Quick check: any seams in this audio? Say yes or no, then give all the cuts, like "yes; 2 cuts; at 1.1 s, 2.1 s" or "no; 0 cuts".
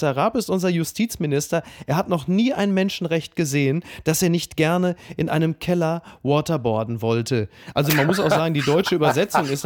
no; 0 cuts